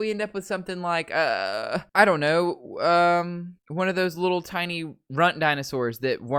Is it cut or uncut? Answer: cut